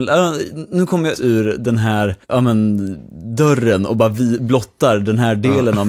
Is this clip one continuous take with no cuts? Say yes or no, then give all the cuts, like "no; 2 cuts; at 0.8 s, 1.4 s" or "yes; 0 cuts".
no; 2 cuts; at 1.1 s, 2.2 s